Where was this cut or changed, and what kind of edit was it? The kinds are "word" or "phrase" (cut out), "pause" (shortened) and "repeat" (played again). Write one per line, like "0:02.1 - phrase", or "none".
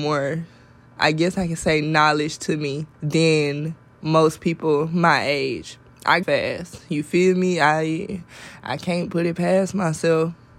0:02.9 - pause
0:06.2 - phrase